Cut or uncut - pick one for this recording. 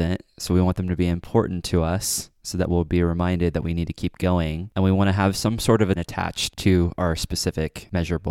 cut